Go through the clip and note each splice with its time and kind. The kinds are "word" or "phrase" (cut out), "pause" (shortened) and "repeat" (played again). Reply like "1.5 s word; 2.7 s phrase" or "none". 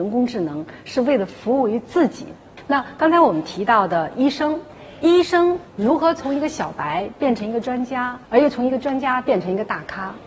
5.7 s pause; 8.2 s pause